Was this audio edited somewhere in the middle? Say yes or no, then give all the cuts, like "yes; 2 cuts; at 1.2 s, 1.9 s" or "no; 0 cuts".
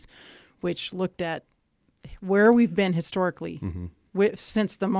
no; 0 cuts